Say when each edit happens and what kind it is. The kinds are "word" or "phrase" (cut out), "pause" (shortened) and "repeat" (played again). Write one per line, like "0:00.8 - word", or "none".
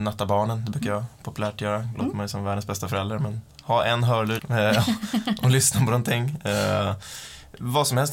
0:04.4 - word